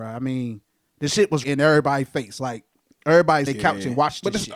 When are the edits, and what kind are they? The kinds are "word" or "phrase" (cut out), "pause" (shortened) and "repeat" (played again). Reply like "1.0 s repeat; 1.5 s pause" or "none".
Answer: 1.4 s word; 3.5 s phrase